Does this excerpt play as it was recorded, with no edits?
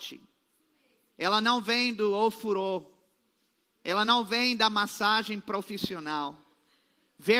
yes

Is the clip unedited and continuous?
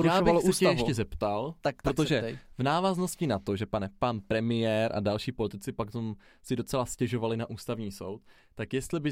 yes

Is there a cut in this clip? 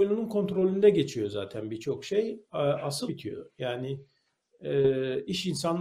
yes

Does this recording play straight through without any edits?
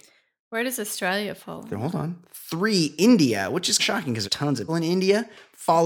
no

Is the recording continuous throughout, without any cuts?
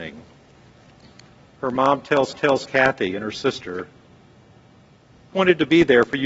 no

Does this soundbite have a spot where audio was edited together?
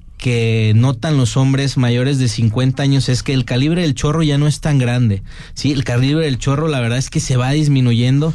no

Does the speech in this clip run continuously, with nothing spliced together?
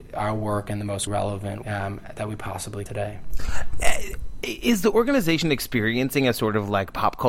no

